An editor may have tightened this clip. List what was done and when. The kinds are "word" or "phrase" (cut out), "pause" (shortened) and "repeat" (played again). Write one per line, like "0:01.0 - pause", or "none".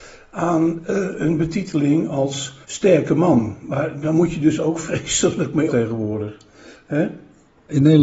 0:02.6 - pause
0:05.7 - word